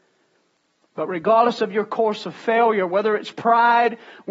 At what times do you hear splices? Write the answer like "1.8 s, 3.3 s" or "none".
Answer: none